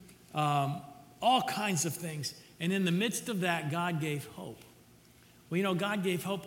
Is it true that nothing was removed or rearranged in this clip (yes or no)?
yes